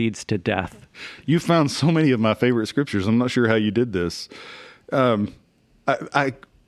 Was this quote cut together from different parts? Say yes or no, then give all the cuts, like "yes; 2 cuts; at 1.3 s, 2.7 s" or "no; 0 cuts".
no; 0 cuts